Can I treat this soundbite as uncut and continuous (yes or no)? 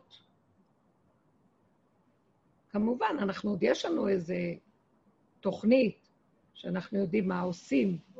no